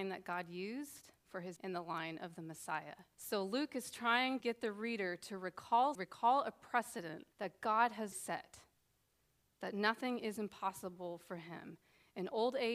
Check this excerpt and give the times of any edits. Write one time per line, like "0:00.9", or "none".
0:01.6
0:03.1
0:04.4
0:05.9
0:07.3
0:08.1